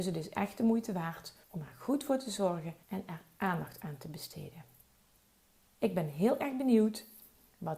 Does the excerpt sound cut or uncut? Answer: cut